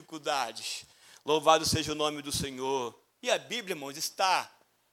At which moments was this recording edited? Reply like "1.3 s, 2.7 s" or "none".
none